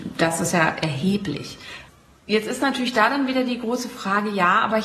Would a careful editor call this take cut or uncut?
uncut